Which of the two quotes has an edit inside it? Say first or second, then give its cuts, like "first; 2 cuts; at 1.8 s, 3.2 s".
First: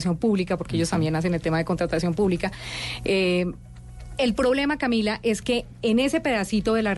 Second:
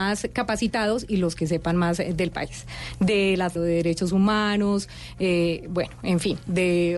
second; 1 cut; at 3.5 s